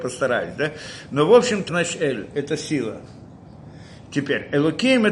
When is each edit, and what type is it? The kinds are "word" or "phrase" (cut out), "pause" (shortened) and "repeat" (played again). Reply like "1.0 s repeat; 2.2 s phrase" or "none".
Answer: 1.7 s word

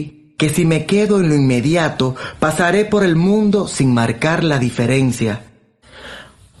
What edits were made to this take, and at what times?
none

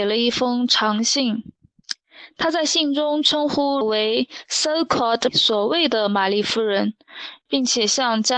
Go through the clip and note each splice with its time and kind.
3.8 s word; 5.3 s word

